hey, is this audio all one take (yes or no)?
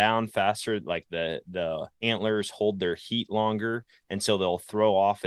no